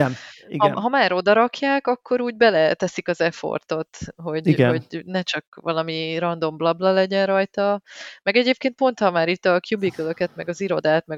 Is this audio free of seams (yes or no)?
yes